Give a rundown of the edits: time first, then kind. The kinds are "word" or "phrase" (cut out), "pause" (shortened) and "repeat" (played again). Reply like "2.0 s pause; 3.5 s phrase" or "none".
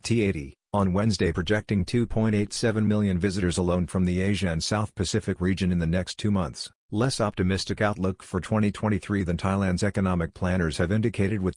6.8 s pause